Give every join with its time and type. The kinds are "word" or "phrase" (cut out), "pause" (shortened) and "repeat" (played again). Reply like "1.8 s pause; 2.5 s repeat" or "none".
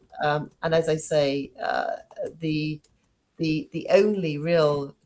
none